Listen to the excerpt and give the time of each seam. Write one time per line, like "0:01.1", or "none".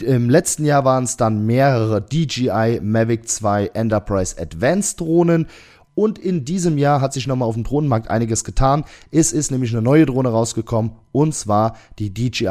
none